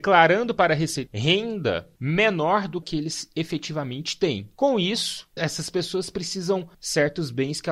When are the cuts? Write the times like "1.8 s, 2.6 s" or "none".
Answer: 1.1 s, 2.8 s, 5.4 s, 6.7 s

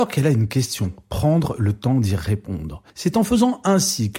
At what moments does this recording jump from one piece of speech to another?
2.9 s

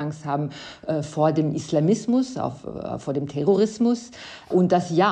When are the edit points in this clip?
none

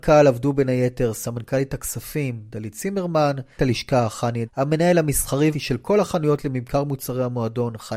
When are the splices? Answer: 3.6 s, 4.4 s, 5.5 s

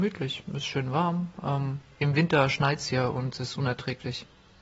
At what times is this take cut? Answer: none

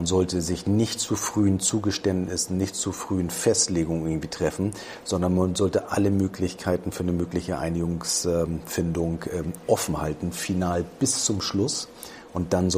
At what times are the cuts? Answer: none

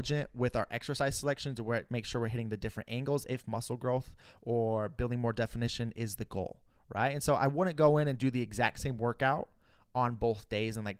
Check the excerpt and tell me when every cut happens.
none

